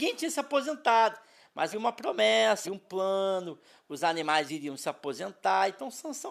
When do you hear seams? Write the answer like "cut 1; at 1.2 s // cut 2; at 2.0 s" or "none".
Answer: cut 1; at 1.7 s // cut 2; at 2.6 s // cut 3; at 4.5 s